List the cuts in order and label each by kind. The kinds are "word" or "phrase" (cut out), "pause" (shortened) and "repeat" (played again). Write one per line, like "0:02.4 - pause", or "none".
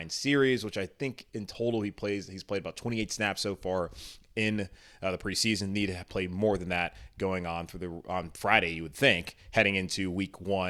none